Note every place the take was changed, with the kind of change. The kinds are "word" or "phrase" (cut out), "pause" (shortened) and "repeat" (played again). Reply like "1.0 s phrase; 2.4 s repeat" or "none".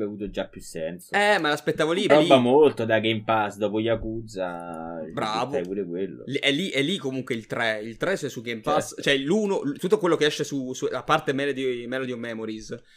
2.1 s phrase; 9.8 s word